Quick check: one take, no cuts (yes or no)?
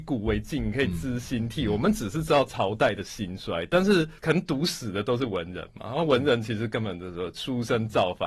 no